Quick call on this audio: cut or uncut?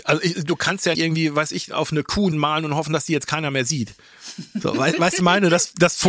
cut